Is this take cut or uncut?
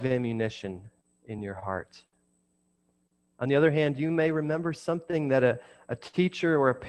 uncut